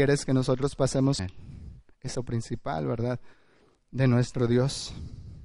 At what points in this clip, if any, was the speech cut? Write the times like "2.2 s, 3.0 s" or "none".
1.2 s, 2.1 s